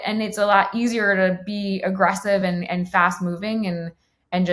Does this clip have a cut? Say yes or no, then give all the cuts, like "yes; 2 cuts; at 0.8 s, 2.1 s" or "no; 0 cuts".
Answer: no; 0 cuts